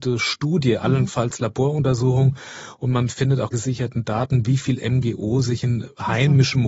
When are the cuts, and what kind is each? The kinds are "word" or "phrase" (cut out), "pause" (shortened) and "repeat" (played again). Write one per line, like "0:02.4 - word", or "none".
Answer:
0:03.5 - word